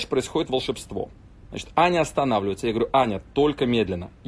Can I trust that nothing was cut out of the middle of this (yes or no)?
yes